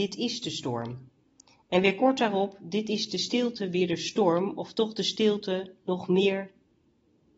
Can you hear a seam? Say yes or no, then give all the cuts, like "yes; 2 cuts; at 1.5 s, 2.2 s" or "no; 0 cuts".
no; 0 cuts